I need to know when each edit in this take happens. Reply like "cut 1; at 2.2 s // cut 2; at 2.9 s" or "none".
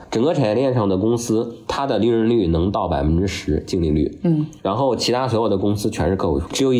cut 1; at 4.6 s